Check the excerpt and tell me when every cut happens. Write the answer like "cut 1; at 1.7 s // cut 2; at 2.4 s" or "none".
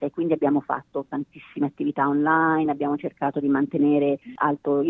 none